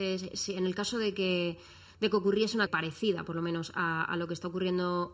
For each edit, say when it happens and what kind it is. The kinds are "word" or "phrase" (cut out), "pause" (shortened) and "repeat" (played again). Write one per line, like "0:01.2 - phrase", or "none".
0:02.7 - word